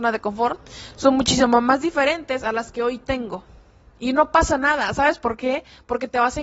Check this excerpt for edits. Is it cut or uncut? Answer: uncut